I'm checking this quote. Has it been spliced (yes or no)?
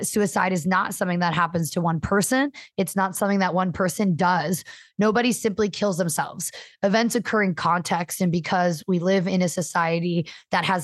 no